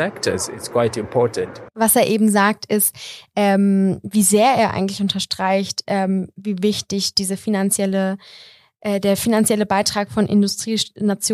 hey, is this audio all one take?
no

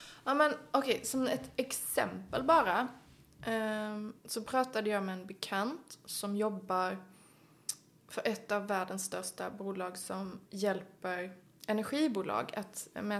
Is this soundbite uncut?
no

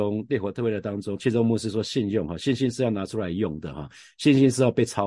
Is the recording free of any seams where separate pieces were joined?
yes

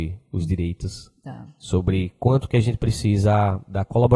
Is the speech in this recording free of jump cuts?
yes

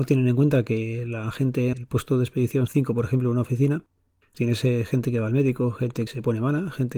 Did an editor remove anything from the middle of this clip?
yes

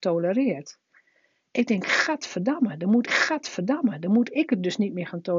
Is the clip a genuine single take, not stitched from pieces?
no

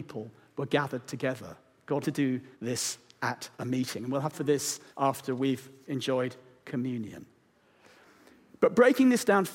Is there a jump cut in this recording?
yes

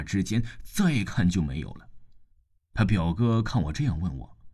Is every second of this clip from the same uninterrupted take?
no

